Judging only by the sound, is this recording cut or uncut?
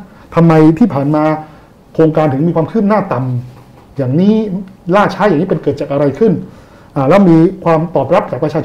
uncut